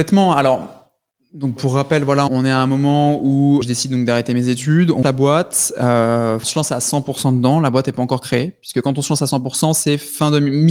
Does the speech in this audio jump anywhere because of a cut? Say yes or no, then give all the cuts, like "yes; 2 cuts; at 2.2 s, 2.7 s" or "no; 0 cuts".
yes; 5 cuts; at 1.6 s, 2.3 s, 3.6 s, 5.0 s, 6.4 s